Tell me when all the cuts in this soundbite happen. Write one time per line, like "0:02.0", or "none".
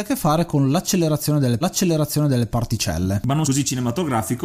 0:01.6
0:03.4